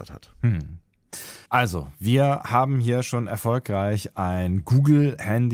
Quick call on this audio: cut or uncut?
cut